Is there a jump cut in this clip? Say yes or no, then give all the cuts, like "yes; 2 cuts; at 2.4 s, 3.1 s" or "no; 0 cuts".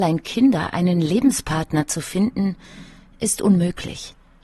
no; 0 cuts